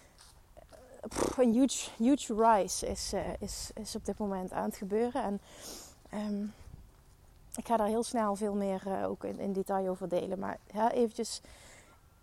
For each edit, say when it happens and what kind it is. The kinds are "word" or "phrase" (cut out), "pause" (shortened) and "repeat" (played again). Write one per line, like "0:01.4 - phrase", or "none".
none